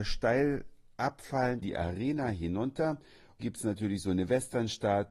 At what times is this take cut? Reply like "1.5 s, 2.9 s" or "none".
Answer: 1.6 s, 3.4 s